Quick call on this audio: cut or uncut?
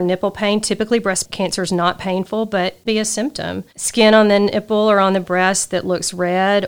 cut